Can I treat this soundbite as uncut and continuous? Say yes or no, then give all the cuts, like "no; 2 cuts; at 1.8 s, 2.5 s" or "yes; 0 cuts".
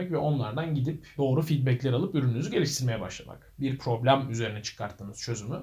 no; 1 cut; at 1.2 s